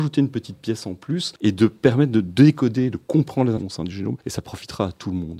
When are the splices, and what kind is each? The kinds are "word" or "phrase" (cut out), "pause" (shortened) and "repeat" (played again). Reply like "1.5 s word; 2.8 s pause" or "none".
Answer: 1.4 s pause; 3.6 s word; 4.2 s pause